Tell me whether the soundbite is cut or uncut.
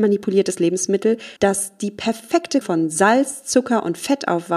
cut